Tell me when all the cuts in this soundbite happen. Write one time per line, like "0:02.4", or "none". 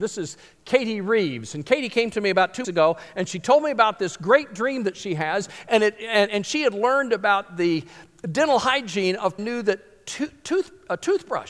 0:02.6
0:09.4